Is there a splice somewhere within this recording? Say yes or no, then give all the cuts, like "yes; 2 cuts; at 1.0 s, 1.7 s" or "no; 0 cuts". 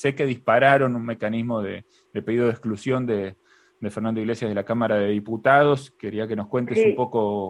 no; 0 cuts